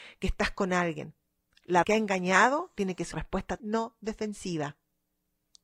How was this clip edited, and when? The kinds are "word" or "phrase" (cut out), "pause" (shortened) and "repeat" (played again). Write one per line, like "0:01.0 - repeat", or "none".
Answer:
0:01.8 - phrase
0:03.1 - word
0:03.6 - word